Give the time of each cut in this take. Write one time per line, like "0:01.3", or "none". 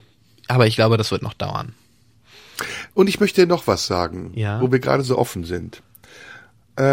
0:02.9